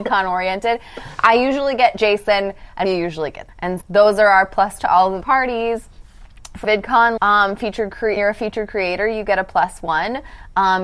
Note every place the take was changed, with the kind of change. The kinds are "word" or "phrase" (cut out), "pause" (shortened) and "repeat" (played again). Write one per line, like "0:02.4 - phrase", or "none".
0:02.8 - word
0:03.5 - word
0:03.8 - word
0:04.8 - word
0:05.2 - word
0:06.6 - word
0:07.2 - word
0:08.2 - word